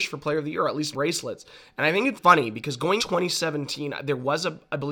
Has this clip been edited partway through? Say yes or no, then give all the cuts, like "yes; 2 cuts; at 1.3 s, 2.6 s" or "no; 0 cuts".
yes; 3 cuts; at 0.9 s, 2.1 s, 3.0 s